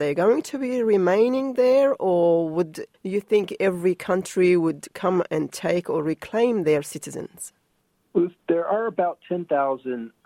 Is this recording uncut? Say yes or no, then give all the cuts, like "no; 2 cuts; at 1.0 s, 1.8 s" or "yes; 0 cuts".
no; 1 cut; at 2.9 s